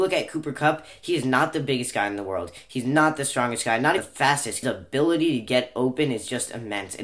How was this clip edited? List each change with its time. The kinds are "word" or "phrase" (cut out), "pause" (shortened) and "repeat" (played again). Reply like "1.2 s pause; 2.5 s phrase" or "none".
4.0 s word; 4.6 s phrase